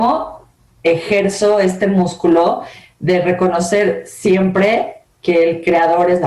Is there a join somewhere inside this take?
no; 0 cuts

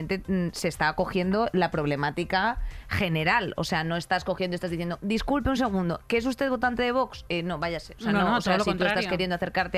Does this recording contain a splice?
no; 0 cuts

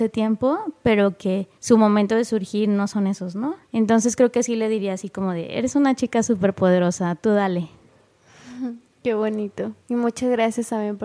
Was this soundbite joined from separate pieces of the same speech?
yes; 3 cuts; at 1.5 s, 3.6 s, 9.8 s

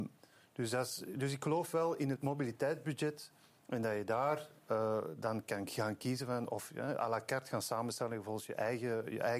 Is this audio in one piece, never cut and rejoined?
yes; 0 cuts

